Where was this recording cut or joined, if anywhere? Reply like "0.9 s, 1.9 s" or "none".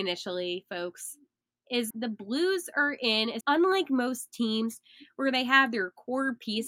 1.9 s, 3.4 s